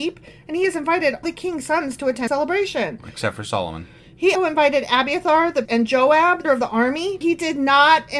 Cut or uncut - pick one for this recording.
cut